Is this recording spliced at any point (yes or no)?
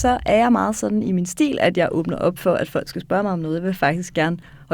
no